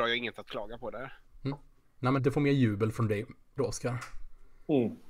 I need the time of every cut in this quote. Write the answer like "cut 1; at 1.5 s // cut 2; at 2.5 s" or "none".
cut 1; at 2.2 s // cut 2; at 3.6 s